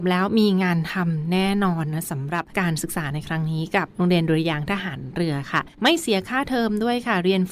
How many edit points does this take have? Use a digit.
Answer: 2